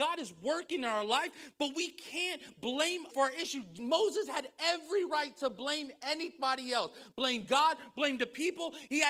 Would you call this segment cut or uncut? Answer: cut